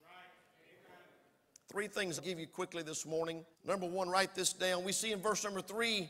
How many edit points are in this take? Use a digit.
2